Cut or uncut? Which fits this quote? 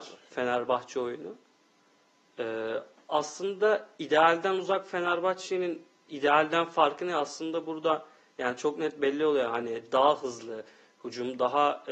uncut